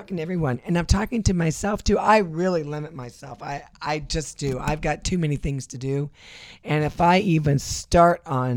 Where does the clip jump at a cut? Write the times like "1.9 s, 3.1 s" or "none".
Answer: none